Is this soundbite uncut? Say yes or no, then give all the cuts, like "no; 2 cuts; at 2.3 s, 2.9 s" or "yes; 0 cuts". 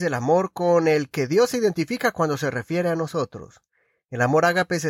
yes; 0 cuts